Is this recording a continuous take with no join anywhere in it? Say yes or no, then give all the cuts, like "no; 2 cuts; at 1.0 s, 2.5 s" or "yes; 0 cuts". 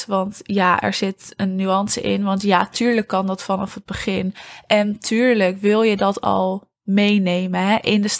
yes; 0 cuts